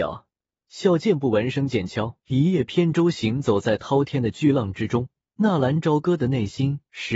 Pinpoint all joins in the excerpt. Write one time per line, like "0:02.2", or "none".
0:02.2
0:05.2